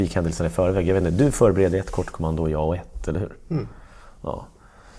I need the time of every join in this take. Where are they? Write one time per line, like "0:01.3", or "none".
none